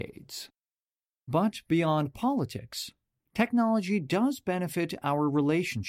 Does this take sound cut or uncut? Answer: uncut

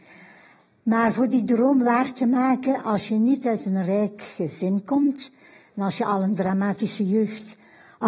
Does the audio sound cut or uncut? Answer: uncut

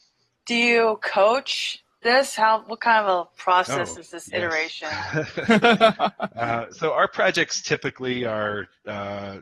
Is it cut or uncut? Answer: uncut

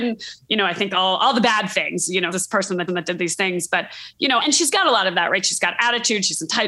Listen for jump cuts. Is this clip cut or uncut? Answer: cut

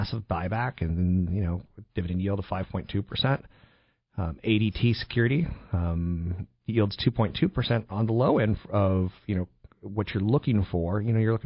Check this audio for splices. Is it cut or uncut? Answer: uncut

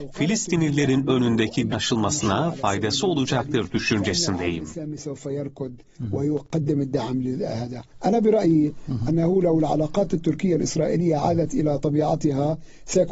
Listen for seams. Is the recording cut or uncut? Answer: cut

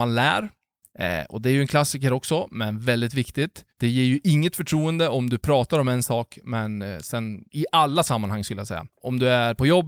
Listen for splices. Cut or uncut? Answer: cut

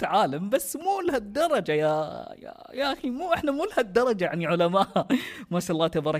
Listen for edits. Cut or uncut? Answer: uncut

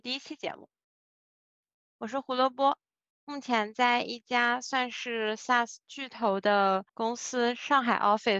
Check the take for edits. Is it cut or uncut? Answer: cut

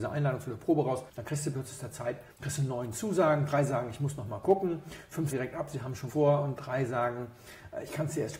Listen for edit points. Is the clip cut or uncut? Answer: cut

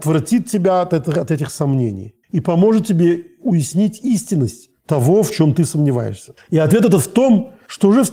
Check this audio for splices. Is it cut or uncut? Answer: cut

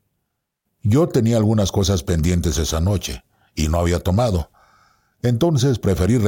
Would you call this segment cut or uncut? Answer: uncut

